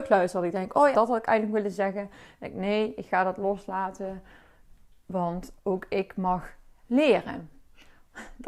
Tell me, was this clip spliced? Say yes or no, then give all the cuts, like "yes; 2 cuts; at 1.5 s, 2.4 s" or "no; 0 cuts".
yes; 1 cut; at 0.9 s